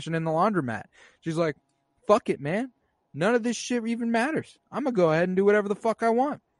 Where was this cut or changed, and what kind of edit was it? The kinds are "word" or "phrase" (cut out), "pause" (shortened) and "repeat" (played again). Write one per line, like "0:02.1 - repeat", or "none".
none